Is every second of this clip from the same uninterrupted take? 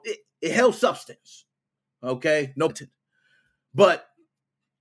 no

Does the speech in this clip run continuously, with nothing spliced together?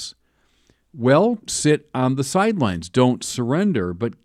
no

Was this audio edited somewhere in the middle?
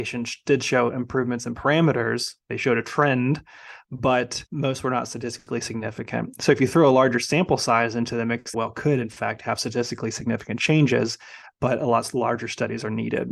yes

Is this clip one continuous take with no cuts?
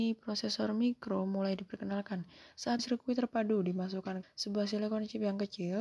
no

